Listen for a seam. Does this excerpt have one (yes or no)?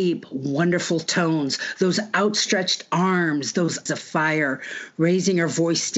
yes